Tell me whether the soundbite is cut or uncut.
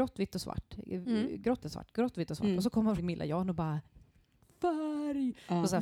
cut